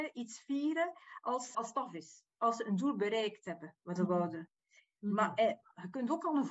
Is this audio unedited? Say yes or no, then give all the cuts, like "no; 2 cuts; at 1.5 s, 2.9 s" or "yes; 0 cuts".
no; 2 cuts; at 1.5 s, 4.0 s